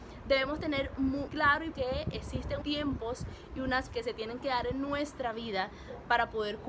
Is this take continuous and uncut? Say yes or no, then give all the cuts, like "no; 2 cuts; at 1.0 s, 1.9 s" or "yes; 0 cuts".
no; 4 cuts; at 1.3 s, 1.7 s, 2.6 s, 3.9 s